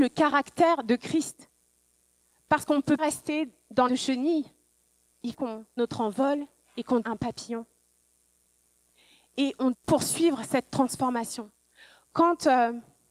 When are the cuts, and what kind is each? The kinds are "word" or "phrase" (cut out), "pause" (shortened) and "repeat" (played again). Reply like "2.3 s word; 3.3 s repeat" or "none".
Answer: 3.0 s word; 3.9 s word; 5.3 s word; 5.8 s word; 7.0 s word; 9.7 s word

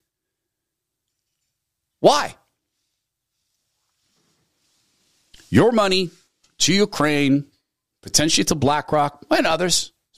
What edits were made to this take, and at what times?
none

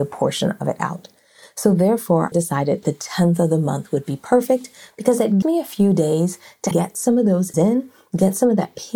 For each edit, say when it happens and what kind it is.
2.3 s word; 5.4 s word; 6.7 s word; 7.5 s word

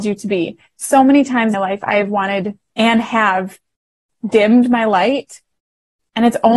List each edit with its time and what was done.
1.5 s word

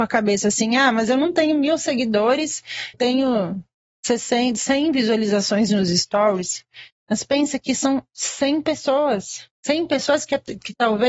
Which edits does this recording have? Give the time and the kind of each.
2.9 s word; 9.5 s pause

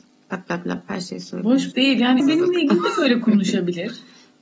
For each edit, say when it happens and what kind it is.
1.7 s word; 2.2 s word

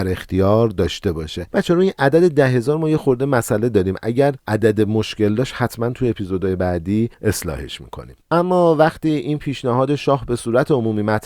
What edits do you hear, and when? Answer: 8.2 s pause

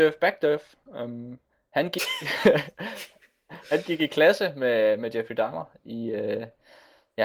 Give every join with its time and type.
none

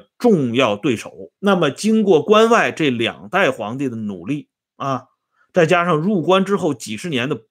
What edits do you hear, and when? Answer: 1.4 s pause; 4.7 s pause

